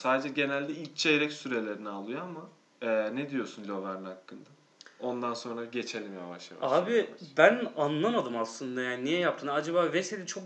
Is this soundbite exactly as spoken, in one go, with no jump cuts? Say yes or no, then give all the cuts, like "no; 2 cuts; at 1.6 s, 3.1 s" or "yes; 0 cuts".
no; 1 cut; at 2.6 s